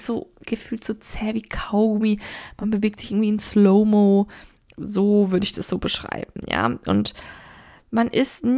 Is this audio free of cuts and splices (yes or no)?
yes